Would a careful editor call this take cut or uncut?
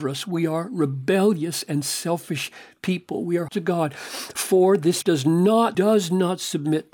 cut